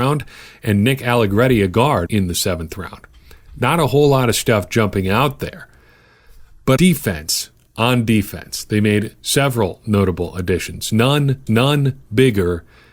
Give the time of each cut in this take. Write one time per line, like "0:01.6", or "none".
0:02.1
0:06.8
0:07.7
0:11.5